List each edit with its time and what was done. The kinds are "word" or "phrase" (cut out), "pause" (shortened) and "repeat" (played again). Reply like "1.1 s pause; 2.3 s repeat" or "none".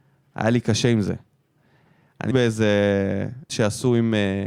2.3 s word; 3.5 s word